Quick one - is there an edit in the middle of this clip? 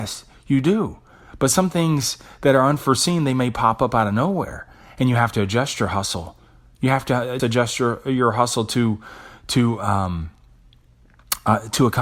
yes; 1 cut; at 7.4 s

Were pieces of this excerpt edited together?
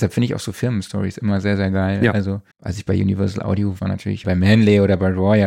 yes; 3 cuts; at 2.5 s, 3.8 s, 4.2 s

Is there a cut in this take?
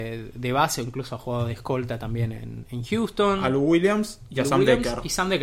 no; 0 cuts

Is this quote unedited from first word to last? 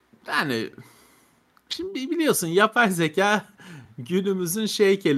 yes; 0 cuts

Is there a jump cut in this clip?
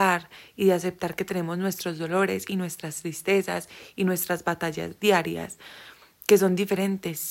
no; 0 cuts

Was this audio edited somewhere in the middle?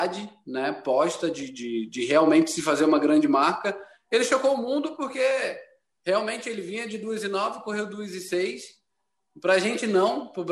no; 0 cuts

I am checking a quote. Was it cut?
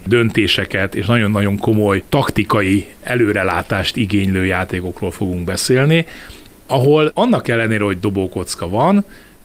no; 0 cuts

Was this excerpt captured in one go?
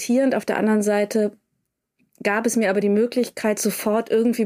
yes; 0 cuts

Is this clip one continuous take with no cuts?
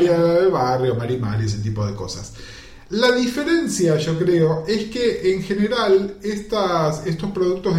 yes; 0 cuts

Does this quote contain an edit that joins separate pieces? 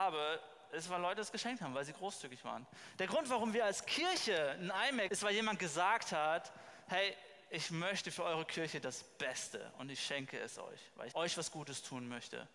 yes; 2 cuts; at 5.1 s, 11.1 s

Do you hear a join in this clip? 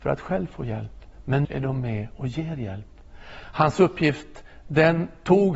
yes; 1 cut; at 1.4 s

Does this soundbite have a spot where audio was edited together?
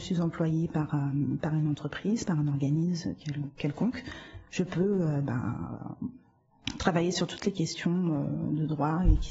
no; 0 cuts

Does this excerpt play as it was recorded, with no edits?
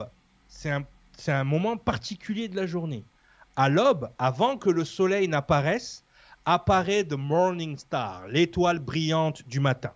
yes; 0 cuts

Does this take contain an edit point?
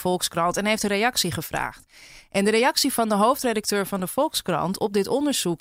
no; 0 cuts

